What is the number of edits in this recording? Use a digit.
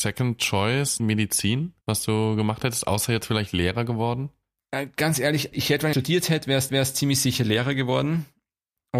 5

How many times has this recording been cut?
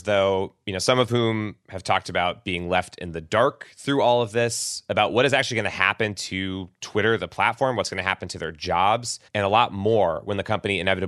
1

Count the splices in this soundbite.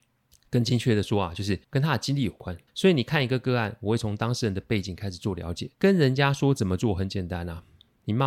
3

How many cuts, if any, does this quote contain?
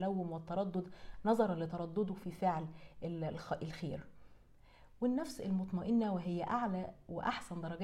0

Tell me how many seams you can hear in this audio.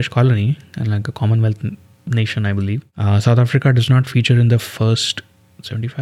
0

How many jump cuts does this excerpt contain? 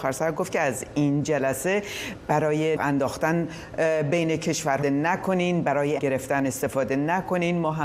3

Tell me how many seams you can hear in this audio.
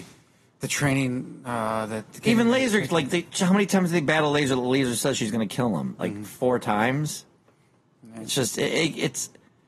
0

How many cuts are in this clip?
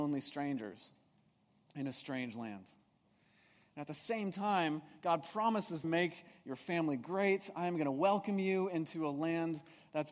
1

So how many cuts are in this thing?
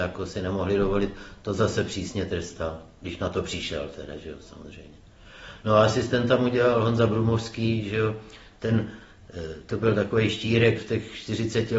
1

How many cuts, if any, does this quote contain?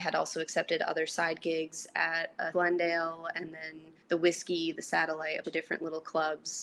3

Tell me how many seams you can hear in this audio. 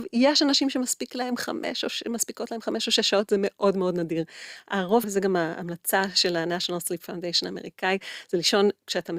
1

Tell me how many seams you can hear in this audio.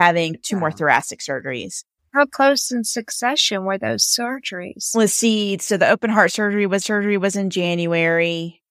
2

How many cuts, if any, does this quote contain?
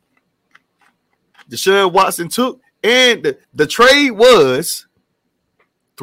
1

